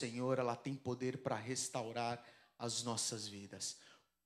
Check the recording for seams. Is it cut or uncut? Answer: uncut